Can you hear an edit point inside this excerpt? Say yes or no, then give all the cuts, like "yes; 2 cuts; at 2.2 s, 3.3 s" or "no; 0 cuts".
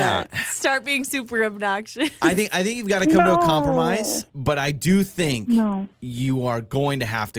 no; 0 cuts